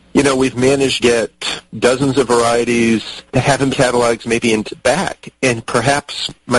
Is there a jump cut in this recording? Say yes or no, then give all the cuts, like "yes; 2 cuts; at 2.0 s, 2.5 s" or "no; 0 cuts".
yes; 5 cuts; at 1.0 s, 1.7 s, 3.3 s, 3.7 s, 4.6 s